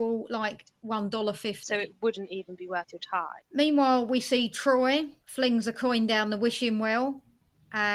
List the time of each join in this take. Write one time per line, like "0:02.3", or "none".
0:03.4